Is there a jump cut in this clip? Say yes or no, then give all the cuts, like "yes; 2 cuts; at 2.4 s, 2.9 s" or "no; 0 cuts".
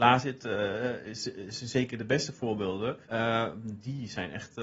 yes; 1 cut; at 3.0 s